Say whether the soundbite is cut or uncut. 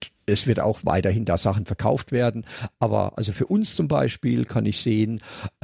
uncut